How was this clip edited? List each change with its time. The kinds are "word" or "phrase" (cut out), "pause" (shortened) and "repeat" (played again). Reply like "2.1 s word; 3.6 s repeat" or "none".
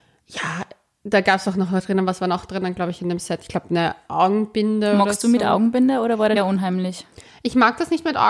6.4 s word